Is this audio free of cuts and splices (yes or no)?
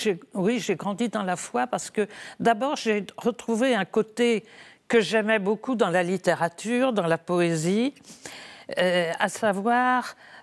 yes